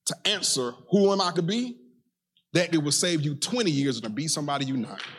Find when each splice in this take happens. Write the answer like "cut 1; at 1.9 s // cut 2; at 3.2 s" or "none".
cut 1; at 1.3 s // cut 2; at 2.7 s // cut 3; at 4.0 s

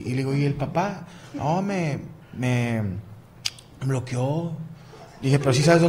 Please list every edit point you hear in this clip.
cut 1; at 2.2 s

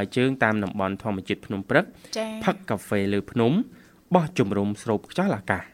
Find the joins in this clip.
none

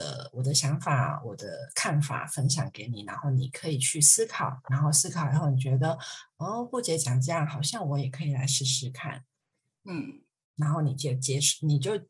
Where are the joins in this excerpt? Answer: none

